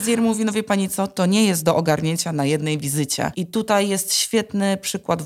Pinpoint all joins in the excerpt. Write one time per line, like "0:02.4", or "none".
none